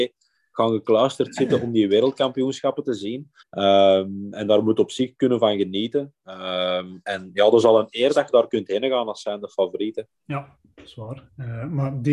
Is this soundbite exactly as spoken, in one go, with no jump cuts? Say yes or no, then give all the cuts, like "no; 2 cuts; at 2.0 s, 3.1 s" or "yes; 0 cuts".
no; 2 cuts; at 3.4 s, 10.1 s